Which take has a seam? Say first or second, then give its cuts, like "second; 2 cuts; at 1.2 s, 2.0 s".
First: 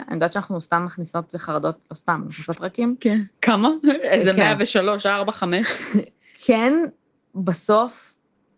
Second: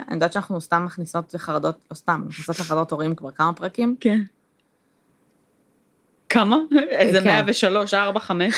first; 2 cuts; at 2.5 s, 3.3 s